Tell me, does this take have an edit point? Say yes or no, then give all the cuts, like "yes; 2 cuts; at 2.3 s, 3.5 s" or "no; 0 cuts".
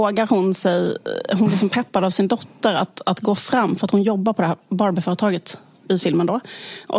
no; 0 cuts